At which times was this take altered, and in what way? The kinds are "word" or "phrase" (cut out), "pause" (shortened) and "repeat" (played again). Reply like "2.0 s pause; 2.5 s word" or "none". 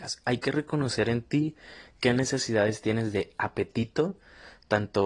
none

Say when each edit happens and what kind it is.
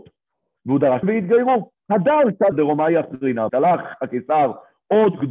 1.0 s word; 2.5 s word; 3.5 s word

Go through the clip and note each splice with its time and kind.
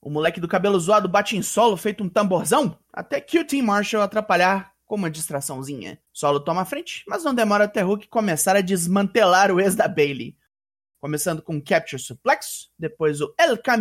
6.0 s pause

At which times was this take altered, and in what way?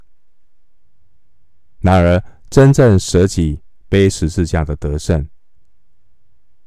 none

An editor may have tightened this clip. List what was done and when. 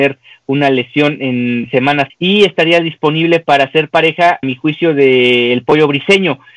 2.1 s word; 4.4 s word

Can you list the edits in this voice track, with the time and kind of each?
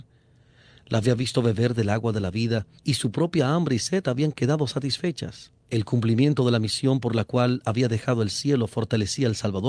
2.8 s pause; 5.6 s pause

